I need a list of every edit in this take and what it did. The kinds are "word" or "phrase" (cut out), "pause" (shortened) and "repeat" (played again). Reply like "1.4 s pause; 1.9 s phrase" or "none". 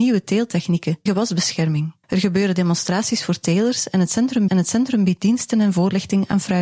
1.1 s phrase; 2.0 s pause; 4.5 s repeat